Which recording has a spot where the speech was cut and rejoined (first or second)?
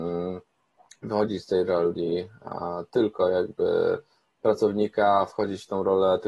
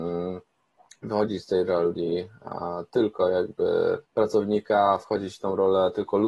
second